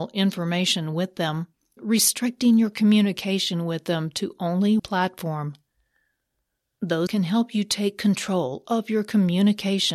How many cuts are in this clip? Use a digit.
3